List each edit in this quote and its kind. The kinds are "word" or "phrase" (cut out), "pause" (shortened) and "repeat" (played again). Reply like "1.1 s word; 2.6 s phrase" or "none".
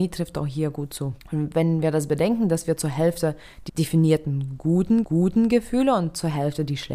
1.2 s pause; 3.7 s word; 5.0 s repeat